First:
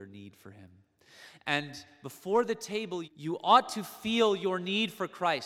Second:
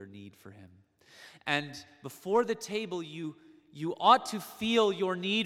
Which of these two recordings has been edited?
first; 1 cut; at 3.0 s

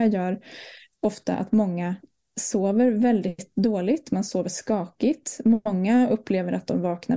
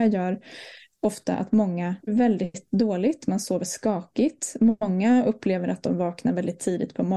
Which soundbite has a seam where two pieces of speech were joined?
second; 1 cut; at 2.1 s

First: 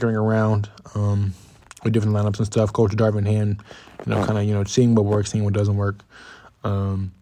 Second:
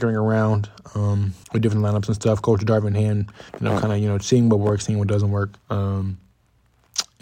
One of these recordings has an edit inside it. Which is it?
second; 3 cuts; at 1.4 s, 3.5 s, 5.6 s

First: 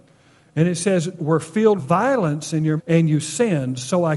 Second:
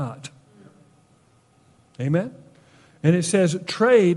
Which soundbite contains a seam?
first; 3 cuts; at 1.2 s, 1.8 s, 2.8 s

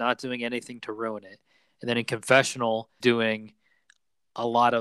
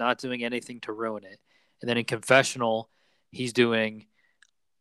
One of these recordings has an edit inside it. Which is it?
first; 1 cut; at 3.0 s

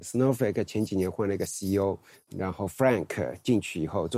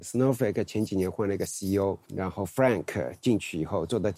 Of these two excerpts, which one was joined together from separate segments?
second; 1 cut; at 2.0 s

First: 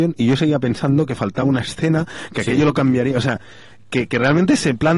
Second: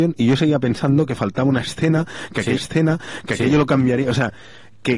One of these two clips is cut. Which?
second; 1 cut; at 2.6 s

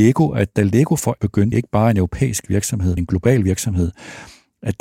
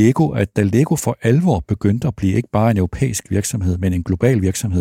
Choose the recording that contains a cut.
first; 3 cuts; at 1.2 s, 1.5 s, 3.0 s

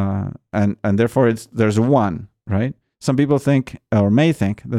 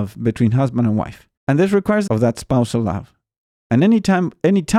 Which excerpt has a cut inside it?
second; 2 cuts; at 1.4 s, 2.1 s

